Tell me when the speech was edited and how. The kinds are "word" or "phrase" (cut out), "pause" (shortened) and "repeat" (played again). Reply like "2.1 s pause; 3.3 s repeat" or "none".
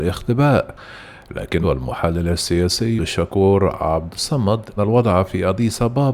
1.6 s word; 3.0 s word; 4.8 s phrase